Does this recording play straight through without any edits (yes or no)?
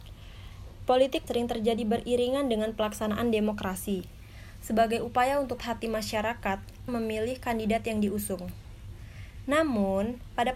no